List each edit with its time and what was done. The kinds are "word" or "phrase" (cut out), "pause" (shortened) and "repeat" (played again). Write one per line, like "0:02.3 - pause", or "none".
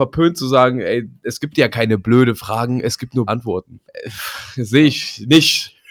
0:03.3 - word
0:03.8 - pause